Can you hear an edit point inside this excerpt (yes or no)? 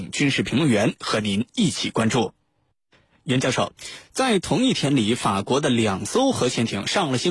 no